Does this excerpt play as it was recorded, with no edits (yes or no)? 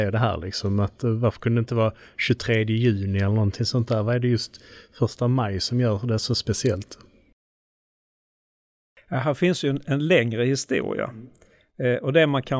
yes